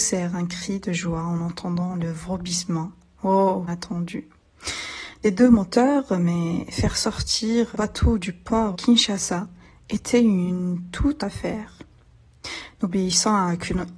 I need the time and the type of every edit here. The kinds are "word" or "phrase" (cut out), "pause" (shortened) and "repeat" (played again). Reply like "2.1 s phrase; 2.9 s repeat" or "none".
3.7 s word; 5.2 s word; 7.7 s word; 8.7 s word; 11.2 s word